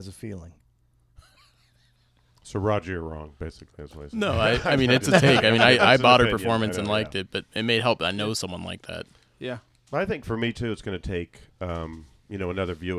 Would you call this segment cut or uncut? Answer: uncut